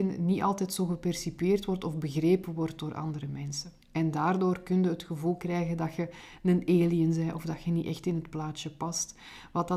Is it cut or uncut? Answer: cut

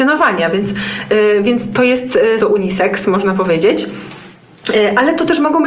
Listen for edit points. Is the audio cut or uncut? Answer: cut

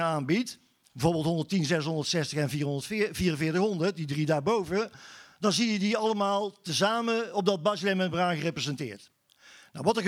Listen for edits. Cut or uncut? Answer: uncut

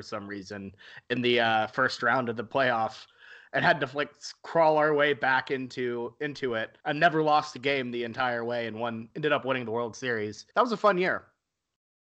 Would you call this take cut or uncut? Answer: cut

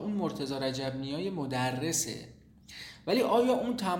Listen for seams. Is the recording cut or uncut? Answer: uncut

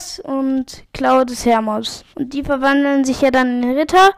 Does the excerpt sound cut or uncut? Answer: cut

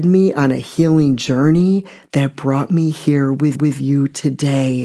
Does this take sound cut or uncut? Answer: cut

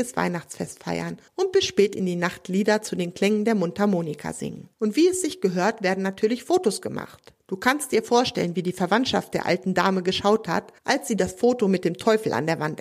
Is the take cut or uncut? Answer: cut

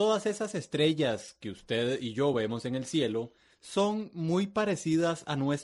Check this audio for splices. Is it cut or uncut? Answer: uncut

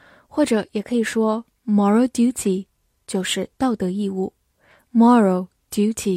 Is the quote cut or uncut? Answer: uncut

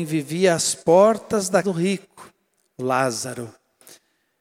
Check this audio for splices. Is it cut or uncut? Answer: cut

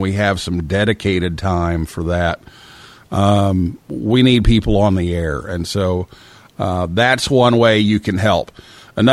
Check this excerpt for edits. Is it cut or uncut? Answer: uncut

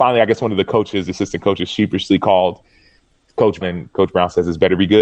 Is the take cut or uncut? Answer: cut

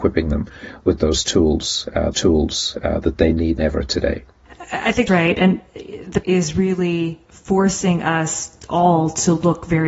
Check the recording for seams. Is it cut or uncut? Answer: cut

